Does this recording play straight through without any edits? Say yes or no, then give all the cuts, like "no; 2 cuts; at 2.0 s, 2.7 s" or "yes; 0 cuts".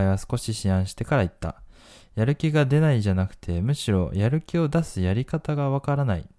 yes; 0 cuts